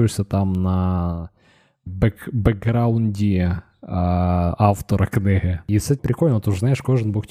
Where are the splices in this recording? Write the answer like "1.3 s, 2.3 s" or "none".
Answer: 1.9 s, 6.0 s